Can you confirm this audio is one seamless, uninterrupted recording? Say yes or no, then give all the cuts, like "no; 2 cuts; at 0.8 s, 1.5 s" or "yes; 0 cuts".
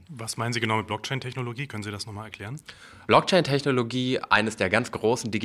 yes; 0 cuts